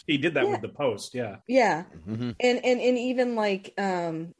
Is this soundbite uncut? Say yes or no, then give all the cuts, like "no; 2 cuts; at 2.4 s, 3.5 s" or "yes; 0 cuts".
yes; 0 cuts